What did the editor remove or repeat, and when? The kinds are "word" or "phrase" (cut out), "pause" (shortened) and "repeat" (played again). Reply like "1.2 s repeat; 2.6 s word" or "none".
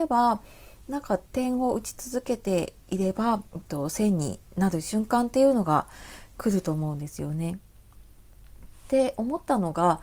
1.3 s pause; 3.5 s pause

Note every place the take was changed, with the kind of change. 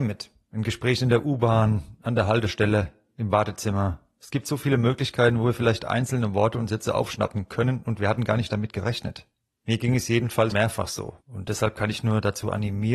10.5 s word; 11.2 s pause

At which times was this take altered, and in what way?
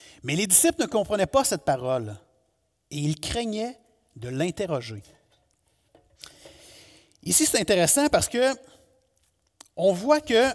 none

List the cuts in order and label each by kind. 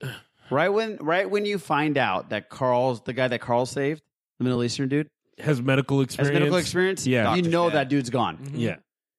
none

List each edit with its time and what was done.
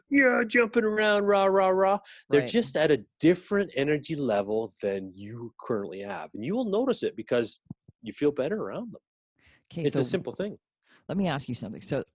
none

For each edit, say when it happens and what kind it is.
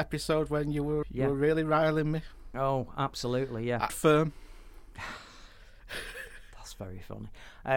1.0 s word; 3.9 s phrase

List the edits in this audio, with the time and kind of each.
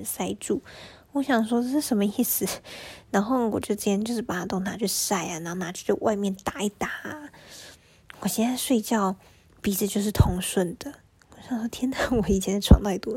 none

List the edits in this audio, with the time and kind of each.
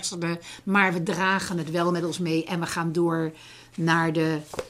none

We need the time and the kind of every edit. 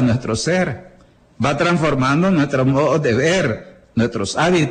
none

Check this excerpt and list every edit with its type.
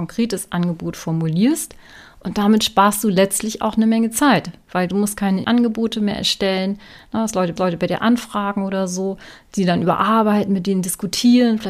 5.4 s word; 7.6 s repeat

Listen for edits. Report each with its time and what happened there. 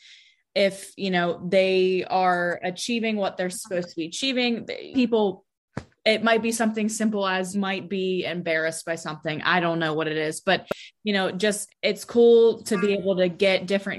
4.9 s word; 7.5 s word; 11.7 s word

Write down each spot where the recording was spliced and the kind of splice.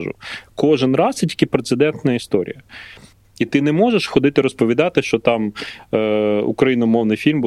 none

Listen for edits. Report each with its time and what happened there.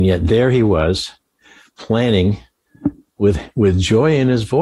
none

